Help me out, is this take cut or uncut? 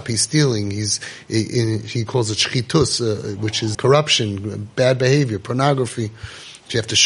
cut